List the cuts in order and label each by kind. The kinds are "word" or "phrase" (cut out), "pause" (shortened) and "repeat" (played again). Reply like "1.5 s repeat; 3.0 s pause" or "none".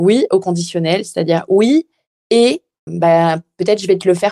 2.9 s word